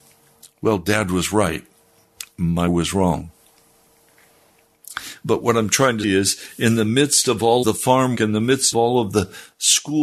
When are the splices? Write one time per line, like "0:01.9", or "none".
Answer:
0:02.7
0:06.0
0:07.6
0:08.1
0:08.7